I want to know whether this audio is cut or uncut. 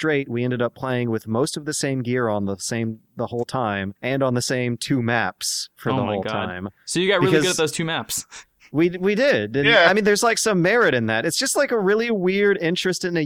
cut